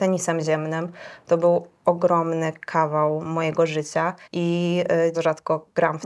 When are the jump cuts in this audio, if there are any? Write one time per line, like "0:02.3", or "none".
0:01.7
0:04.2
0:05.1